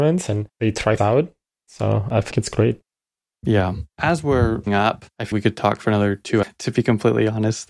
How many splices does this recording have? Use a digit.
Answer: 6